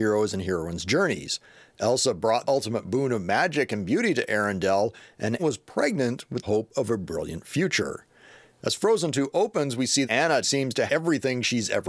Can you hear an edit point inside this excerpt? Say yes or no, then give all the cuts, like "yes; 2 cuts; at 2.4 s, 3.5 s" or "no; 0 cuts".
yes; 6 cuts; at 2.4 s, 5.4 s, 6.4 s, 10.0 s, 10.4 s, 10.9 s